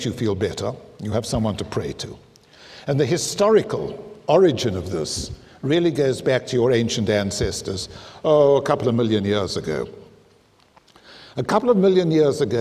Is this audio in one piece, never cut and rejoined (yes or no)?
yes